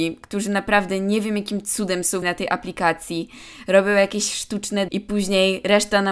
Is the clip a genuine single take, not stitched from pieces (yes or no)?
no